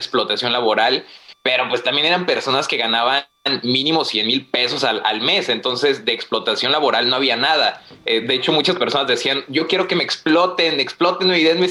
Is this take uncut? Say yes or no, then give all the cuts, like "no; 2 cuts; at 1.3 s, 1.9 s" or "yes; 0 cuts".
yes; 0 cuts